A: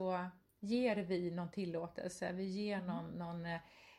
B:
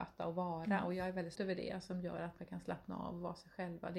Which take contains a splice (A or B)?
B